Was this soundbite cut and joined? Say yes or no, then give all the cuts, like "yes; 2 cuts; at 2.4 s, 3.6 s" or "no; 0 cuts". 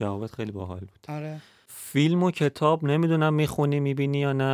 no; 0 cuts